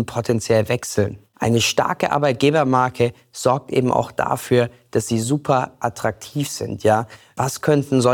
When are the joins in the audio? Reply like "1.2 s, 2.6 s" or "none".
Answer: 1.3 s

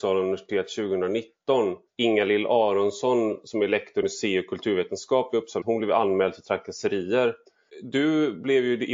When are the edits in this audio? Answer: 4.0 s, 5.6 s

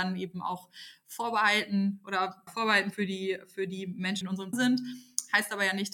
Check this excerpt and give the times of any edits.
2.5 s, 4.2 s, 4.5 s

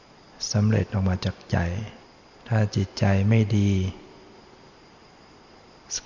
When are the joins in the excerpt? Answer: 2.1 s

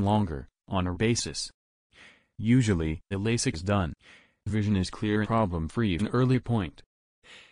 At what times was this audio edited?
0.9 s, 3.1 s, 3.5 s, 5.2 s, 6.0 s

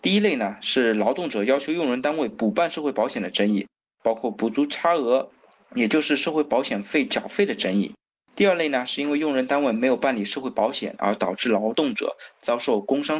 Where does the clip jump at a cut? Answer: 8.1 s

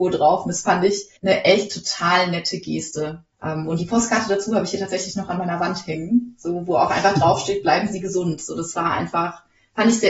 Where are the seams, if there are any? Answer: 1.2 s, 3.3 s

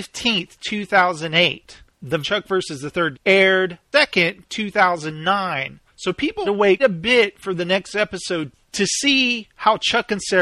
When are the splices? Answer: 2.2 s, 3.1 s, 3.9 s, 5.9 s, 6.4 s, 6.8 s

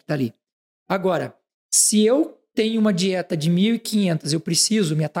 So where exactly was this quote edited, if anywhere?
none

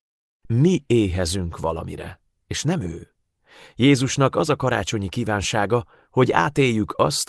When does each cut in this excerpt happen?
none

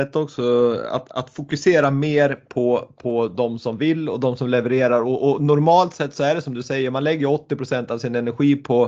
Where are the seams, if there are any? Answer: 1.1 s

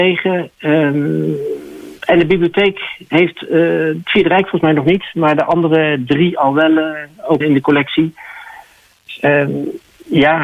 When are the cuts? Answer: 7.4 s

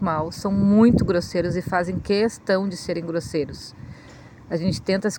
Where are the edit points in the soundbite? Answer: none

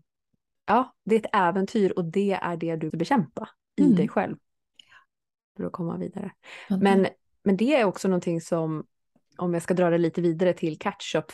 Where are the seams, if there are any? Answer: 2.9 s

